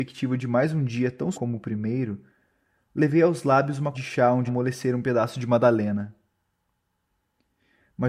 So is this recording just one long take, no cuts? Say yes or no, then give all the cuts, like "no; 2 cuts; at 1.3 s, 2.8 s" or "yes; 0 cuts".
no; 3 cuts; at 1.3 s, 3.9 s, 4.5 s